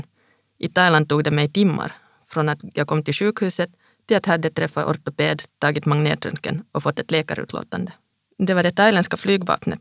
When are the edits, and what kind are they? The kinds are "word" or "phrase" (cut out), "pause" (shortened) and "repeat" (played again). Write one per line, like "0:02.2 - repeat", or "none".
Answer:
0:01.5 - word